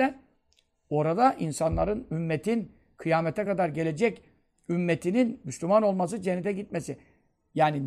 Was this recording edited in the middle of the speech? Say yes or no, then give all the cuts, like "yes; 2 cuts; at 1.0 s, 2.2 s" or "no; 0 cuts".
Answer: no; 0 cuts